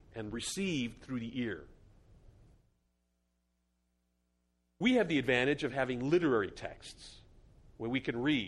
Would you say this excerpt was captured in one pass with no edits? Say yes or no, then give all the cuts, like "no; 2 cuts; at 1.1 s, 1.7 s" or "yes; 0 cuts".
yes; 0 cuts